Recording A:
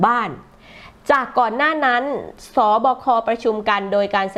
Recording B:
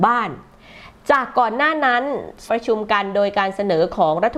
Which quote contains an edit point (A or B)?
B